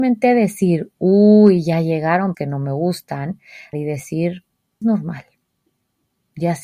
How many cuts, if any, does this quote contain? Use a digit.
3